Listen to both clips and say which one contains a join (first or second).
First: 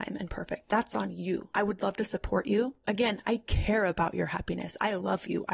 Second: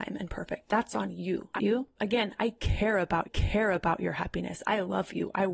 second